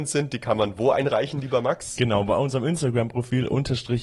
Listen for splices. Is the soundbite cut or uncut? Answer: uncut